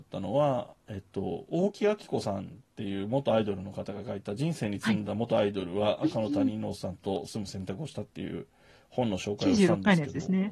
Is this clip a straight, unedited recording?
yes; 0 cuts

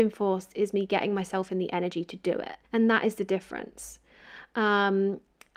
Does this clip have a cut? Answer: yes; 1 cut; at 2.6 s

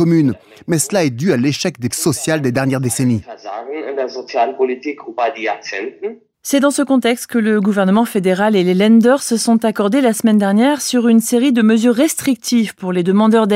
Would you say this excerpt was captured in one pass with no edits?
no; 1 cut; at 1.9 s

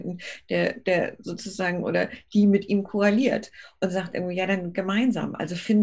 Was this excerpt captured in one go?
yes; 0 cuts

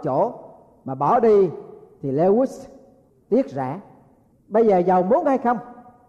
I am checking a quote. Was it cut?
no; 0 cuts

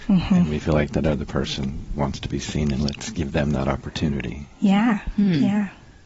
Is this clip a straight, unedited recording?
no; 1 cut; at 1.9 s

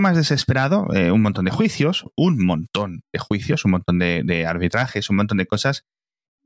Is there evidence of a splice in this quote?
no; 0 cuts

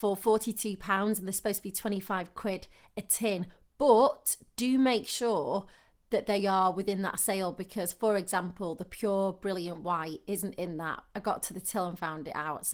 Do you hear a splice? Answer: no; 0 cuts

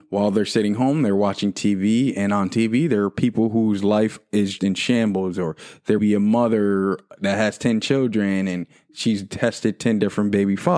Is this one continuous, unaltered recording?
no; 2 cuts; at 4.6 s, 6.0 s

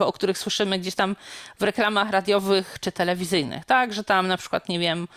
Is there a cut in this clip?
no; 0 cuts

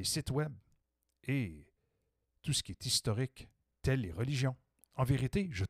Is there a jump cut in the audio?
yes; 1 cut; at 3.6 s

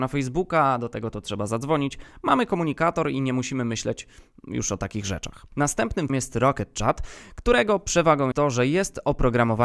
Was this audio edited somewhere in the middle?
yes; 2 cuts; at 6.1 s, 8.3 s

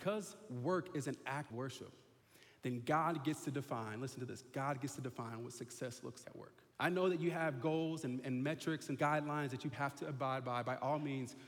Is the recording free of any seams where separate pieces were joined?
no; 6 cuts; at 1.5 s, 2.2 s, 6.2 s, 6.7 s, 9.0 s, 9.7 s

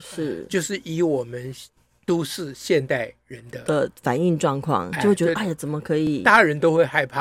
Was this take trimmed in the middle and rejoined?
no; 0 cuts

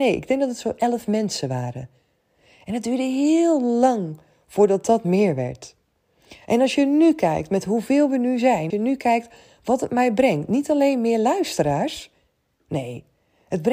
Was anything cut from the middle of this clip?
yes; 1 cut; at 8.7 s

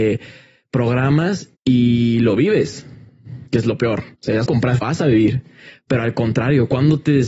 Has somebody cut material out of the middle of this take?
yes; 5 cuts; at 1.5 s, 3.5 s, 4.1 s, 4.5 s, 4.8 s

